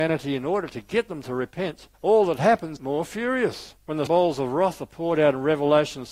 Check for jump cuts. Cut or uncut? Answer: cut